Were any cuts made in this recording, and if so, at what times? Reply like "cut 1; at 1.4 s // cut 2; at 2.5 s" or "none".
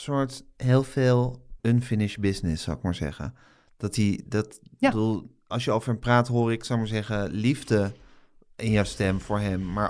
cut 1; at 1.6 s // cut 2; at 4.2 s // cut 3; at 5.5 s